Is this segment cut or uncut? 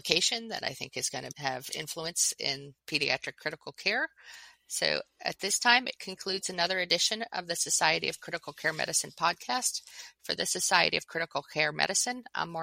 uncut